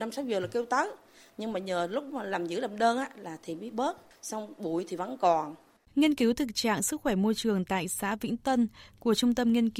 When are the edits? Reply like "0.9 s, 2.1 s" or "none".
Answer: none